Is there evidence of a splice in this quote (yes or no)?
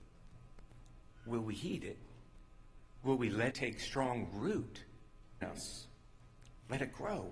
yes